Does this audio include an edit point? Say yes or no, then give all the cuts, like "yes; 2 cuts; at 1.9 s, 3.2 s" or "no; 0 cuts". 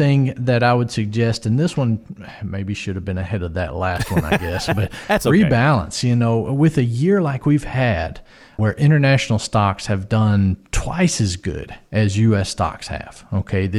no; 0 cuts